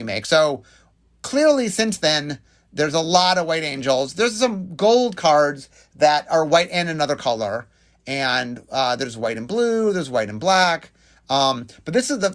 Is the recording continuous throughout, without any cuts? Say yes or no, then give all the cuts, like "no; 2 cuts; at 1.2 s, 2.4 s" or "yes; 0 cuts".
yes; 0 cuts